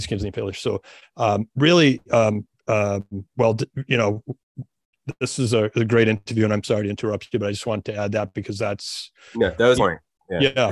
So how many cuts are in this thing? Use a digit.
1